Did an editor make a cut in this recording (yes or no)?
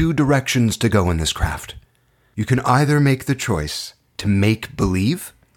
no